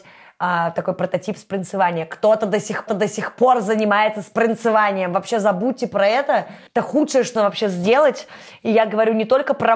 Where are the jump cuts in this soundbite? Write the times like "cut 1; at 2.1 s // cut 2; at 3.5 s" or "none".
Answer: cut 1; at 2.9 s // cut 2; at 6.7 s // cut 3; at 7.4 s